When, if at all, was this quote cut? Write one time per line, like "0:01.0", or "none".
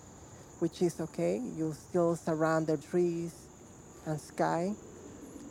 0:02.8